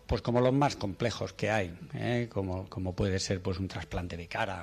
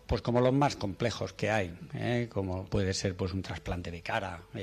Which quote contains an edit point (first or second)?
second